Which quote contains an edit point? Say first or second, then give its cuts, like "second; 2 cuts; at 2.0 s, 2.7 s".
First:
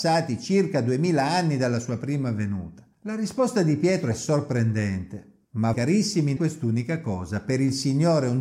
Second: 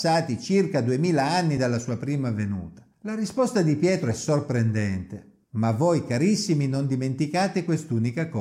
first; 2 cuts; at 5.7 s, 6.4 s